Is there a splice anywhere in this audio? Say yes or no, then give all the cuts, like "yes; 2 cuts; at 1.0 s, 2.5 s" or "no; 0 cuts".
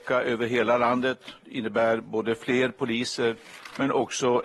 no; 0 cuts